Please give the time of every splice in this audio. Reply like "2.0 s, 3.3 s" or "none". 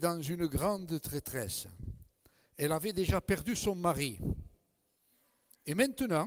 none